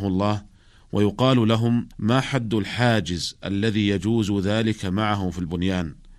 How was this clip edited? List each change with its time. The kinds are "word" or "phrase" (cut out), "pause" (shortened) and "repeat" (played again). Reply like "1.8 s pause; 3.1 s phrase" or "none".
1.9 s pause